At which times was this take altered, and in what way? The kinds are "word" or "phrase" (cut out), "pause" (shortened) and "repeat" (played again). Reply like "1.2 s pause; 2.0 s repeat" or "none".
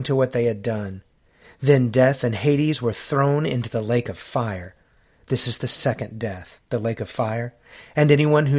6.6 s pause